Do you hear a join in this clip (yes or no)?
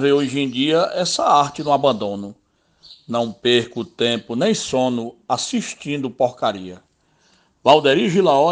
no